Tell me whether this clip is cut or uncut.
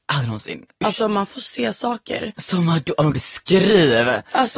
cut